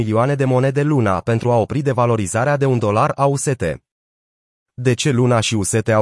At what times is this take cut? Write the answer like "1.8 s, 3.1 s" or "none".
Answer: none